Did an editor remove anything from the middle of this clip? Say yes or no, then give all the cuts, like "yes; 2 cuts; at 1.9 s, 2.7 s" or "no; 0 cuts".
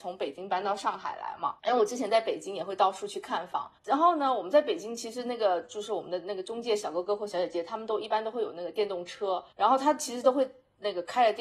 yes; 3 cuts; at 1.6 s, 3.8 s, 9.5 s